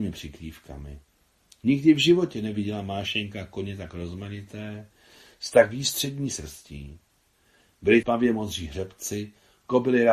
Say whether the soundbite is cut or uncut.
cut